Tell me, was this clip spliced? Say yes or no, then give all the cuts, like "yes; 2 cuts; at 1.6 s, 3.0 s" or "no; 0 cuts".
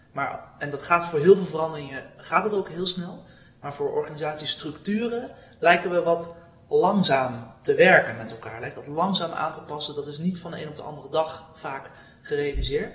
no; 0 cuts